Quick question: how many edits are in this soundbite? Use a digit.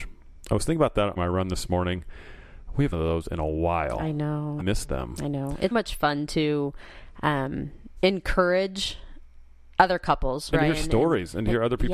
6